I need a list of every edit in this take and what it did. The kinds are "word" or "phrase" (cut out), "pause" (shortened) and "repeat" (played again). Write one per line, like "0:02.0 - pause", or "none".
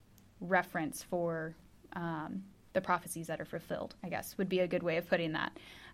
0:04.0 - pause